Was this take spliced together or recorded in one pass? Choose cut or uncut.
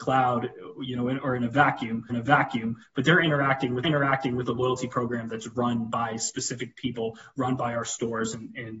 cut